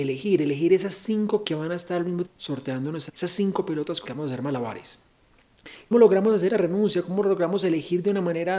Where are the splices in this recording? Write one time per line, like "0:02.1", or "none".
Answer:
0:01.4
0:02.3
0:03.1
0:04.0
0:05.9
0:06.5